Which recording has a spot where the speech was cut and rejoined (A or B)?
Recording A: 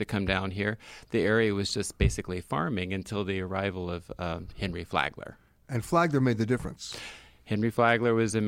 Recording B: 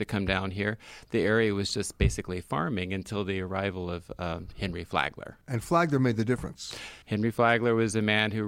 B